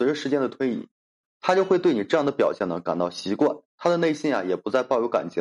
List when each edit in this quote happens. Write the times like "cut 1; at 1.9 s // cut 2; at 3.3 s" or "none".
none